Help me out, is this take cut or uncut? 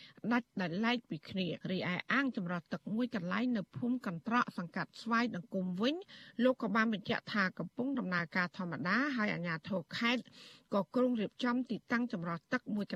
cut